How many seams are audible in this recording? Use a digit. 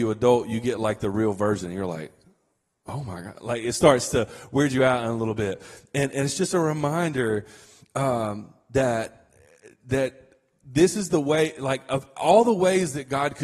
0